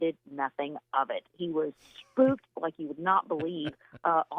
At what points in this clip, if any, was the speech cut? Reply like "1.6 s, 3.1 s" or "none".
none